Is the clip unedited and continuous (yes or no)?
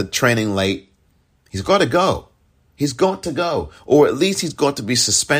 yes